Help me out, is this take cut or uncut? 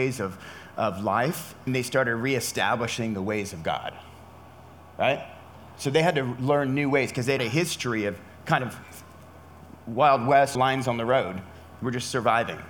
cut